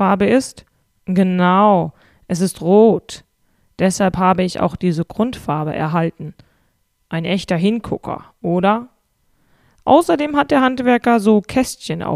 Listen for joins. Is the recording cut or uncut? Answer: uncut